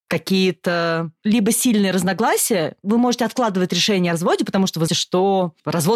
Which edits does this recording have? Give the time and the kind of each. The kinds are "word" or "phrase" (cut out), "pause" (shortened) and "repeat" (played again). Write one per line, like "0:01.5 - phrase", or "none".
0:04.9 - word